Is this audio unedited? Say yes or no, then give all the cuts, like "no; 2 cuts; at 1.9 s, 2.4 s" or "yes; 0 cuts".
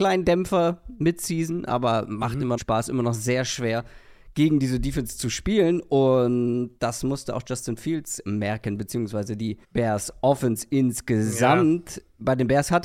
no; 2 cuts; at 2.6 s, 9.6 s